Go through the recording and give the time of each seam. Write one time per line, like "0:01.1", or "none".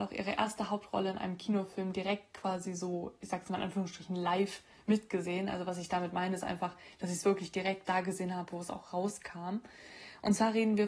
none